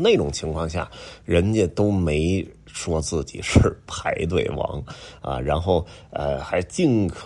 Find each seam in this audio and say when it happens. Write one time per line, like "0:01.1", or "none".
none

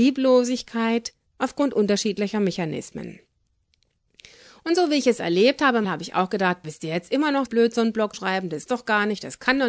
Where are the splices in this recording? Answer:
0:05.8
0:06.6
0:07.5
0:08.1
0:08.7

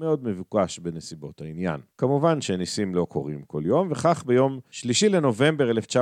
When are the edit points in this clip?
0:01.9

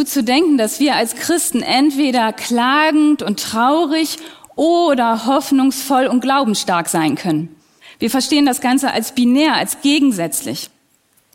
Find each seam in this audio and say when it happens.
none

